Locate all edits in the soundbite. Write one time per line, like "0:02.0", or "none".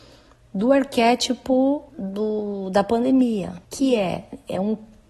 0:01.9
0:03.6